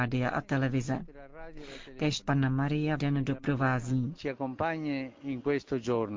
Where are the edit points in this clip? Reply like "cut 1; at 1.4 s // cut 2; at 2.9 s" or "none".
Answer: cut 1; at 2.2 s // cut 2; at 3.0 s